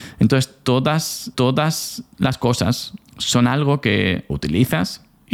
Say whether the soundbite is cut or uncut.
cut